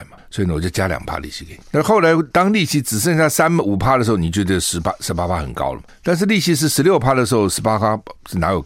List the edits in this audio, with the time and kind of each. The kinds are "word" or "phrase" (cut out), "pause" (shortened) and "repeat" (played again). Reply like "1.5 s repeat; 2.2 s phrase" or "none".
2.3 s pause